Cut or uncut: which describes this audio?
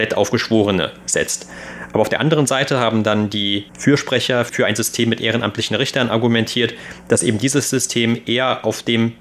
cut